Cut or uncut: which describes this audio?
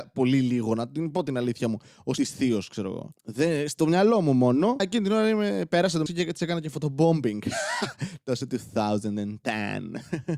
cut